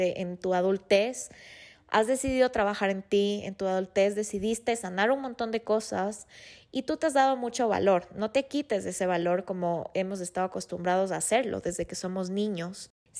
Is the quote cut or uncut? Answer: uncut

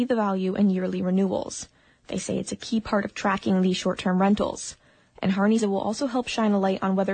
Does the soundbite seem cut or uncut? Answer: cut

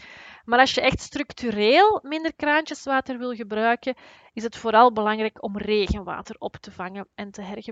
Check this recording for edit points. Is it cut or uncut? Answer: uncut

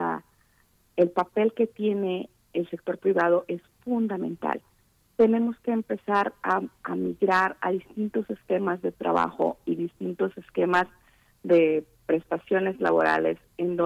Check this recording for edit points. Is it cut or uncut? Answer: uncut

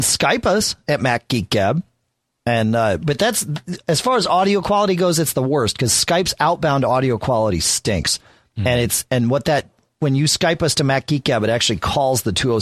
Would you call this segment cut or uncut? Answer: uncut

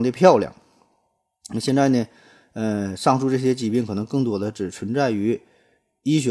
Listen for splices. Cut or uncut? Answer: uncut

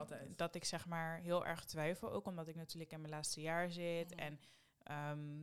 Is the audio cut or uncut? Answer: uncut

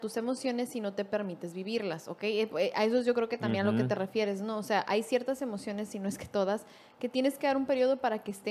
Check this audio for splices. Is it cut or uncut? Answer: uncut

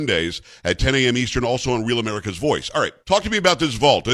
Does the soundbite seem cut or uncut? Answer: cut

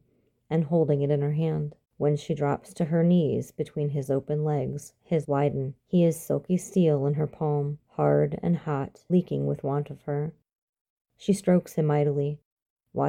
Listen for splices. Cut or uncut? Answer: cut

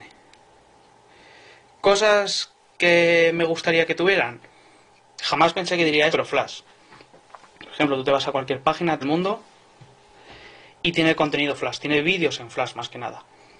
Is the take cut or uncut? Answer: cut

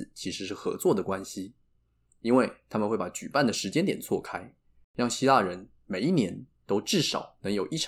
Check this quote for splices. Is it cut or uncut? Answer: uncut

